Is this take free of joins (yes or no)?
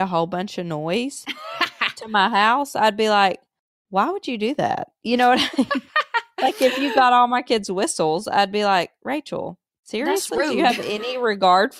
yes